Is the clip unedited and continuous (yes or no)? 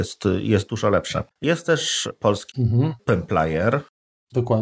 no